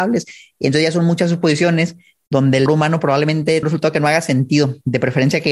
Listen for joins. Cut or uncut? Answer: cut